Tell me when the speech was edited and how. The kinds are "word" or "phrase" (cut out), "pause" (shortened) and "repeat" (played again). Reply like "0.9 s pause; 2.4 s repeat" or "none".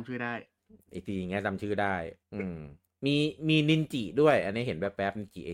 2.2 s pause; 2.9 s pause